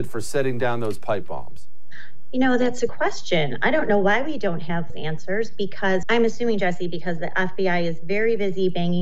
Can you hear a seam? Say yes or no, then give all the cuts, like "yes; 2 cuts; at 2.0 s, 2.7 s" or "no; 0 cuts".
yes; 3 cuts; at 2.9 s, 4.9 s, 6.0 s